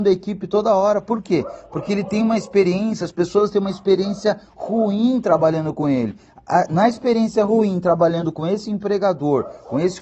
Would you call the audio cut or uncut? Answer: uncut